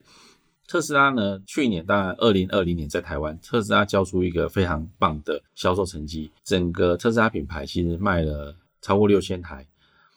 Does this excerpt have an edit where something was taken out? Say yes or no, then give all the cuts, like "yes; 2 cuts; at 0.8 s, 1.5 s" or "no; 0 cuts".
yes; 3 cuts; at 5.5 s, 6.4 s, 8.7 s